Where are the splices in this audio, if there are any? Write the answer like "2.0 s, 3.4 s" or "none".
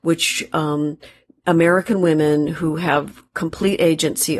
none

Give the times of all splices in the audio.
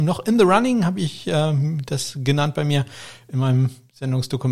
none

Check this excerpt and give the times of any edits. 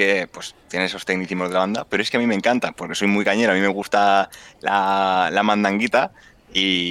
none

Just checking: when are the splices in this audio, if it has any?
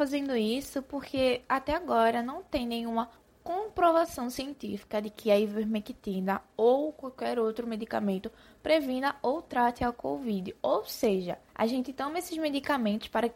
3.2 s, 11.5 s

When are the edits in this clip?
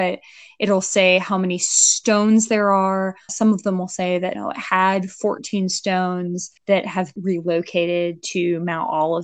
3.3 s, 4.3 s, 6.6 s, 7.2 s

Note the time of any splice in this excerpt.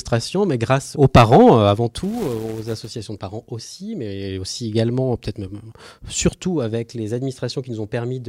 0.9 s

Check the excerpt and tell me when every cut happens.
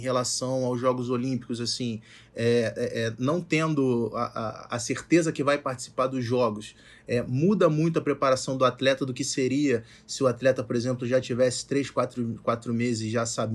none

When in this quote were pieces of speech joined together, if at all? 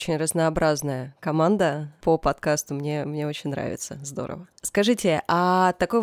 none

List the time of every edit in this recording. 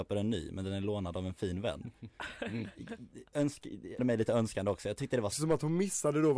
4.0 s, 5.3 s

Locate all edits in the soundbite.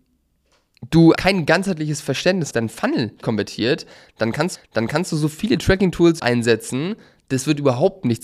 1.2 s, 2.5 s, 3.2 s, 4.5 s, 6.2 s

